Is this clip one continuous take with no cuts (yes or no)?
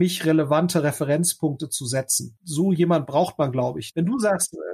yes